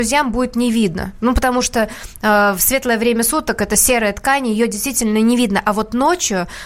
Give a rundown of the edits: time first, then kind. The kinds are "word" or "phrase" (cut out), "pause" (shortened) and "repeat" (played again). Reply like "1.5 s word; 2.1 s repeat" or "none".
none